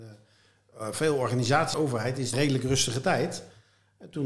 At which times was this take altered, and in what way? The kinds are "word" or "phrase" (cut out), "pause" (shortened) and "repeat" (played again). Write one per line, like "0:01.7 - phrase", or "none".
0:01.7 - word
0:02.3 - phrase